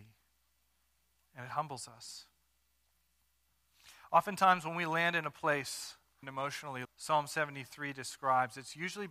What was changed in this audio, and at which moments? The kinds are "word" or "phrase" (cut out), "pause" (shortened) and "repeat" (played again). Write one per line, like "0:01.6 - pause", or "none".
0:06.2 - word
0:06.8 - word